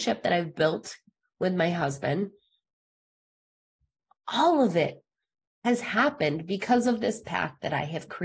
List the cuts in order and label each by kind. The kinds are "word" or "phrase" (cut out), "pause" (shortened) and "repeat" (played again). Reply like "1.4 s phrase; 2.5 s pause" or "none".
none